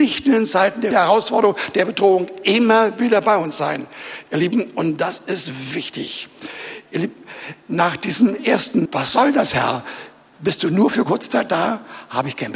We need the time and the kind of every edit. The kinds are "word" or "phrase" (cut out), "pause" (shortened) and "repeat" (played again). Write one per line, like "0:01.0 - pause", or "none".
0:00.9 - phrase
0:05.7 - word
0:08.9 - word